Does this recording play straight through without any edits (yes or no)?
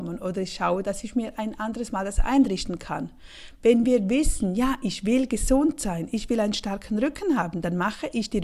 yes